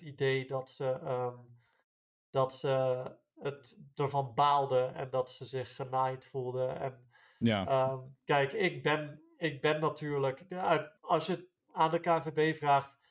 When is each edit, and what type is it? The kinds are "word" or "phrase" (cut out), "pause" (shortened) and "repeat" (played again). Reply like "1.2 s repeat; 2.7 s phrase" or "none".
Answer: 11.0 s pause